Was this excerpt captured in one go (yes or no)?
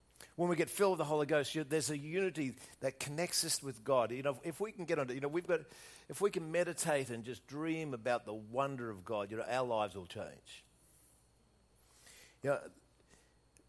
yes